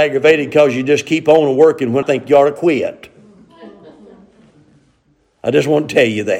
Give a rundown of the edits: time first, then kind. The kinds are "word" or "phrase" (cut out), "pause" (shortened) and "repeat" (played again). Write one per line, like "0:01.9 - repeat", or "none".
0:02.0 - word